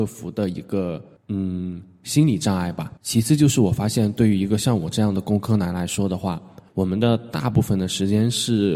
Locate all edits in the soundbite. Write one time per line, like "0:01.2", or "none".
0:01.2
0:03.0
0:06.7